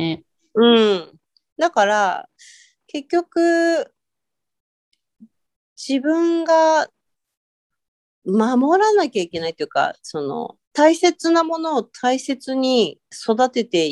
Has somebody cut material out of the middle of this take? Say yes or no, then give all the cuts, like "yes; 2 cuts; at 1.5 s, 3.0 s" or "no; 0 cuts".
yes; 1 cut; at 10.6 s